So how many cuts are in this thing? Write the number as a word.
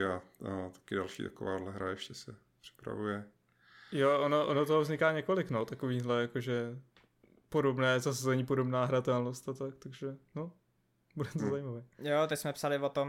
zero